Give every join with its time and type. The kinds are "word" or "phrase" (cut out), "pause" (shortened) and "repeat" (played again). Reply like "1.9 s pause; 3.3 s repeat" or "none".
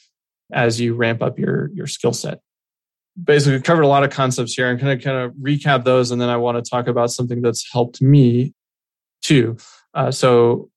3.6 s word

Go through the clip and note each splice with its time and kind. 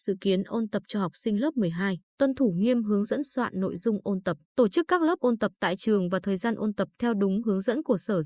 2.1 s pause; 4.4 s pause

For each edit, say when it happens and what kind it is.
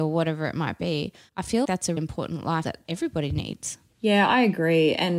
1.6 s word; 2.0 s word; 2.6 s word

